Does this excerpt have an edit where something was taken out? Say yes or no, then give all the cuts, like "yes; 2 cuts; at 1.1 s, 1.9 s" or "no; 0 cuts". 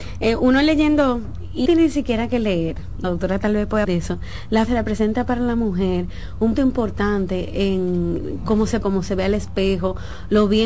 yes; 6 cuts; at 1.7 s, 3.0 s, 3.8 s, 4.7 s, 6.6 s, 8.8 s